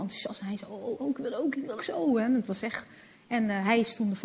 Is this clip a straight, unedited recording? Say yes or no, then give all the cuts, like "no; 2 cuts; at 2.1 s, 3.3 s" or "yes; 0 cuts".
no; 2 cuts; at 1.0 s, 1.8 s